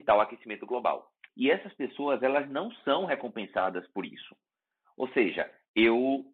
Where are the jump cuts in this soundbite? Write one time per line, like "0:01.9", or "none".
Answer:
0:01.3